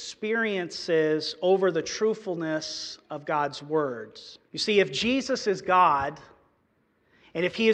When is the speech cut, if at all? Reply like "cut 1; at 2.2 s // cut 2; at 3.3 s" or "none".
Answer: cut 1; at 4.5 s